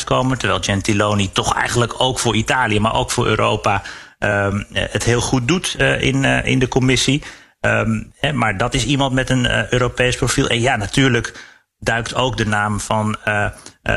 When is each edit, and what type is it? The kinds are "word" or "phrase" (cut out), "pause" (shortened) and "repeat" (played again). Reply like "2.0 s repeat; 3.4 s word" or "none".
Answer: none